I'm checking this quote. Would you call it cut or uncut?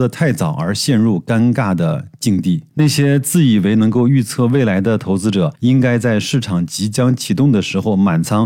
cut